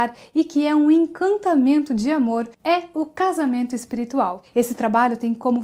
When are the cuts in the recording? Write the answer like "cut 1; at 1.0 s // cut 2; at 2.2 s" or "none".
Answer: cut 1; at 2.5 s